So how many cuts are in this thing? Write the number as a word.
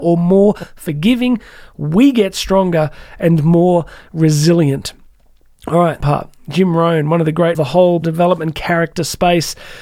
three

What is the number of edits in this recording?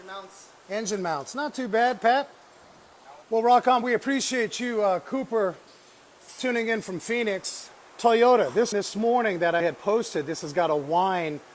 four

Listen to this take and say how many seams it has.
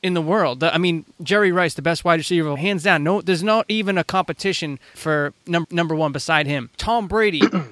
three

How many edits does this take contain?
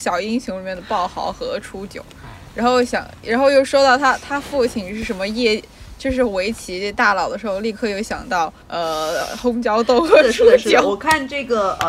one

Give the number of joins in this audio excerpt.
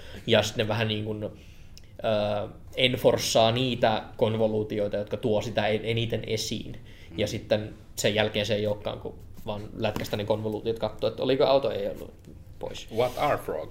zero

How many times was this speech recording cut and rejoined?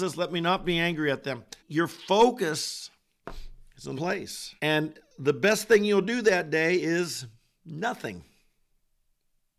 three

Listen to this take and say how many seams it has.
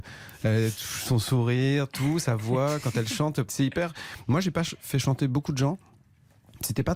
one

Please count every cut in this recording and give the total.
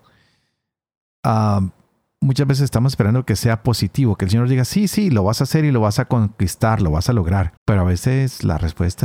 one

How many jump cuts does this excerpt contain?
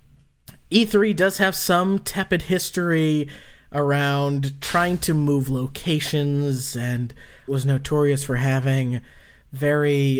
one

